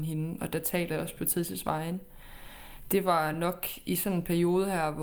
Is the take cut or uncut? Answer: uncut